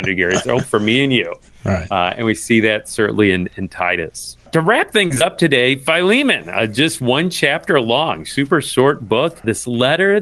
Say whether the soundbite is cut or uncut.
cut